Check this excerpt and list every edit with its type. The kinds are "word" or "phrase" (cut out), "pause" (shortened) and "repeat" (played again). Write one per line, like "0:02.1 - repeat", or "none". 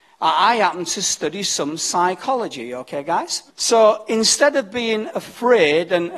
0:03.5 - pause